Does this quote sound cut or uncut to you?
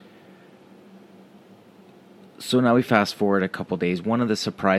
uncut